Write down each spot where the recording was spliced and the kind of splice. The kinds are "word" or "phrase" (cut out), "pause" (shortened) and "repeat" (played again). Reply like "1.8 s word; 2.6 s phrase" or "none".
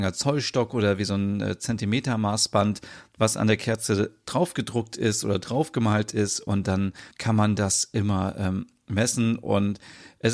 7.1 s pause